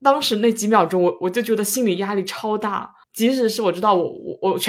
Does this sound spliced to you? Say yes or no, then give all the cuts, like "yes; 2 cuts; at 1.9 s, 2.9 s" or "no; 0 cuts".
yes; 1 cut; at 3.0 s